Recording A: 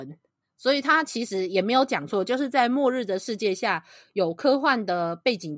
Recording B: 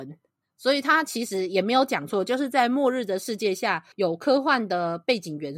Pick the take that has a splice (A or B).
B